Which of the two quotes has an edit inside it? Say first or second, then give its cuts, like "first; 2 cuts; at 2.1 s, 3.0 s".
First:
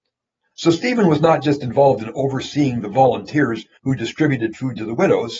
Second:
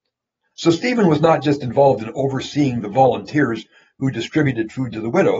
first; 1 cut; at 3.8 s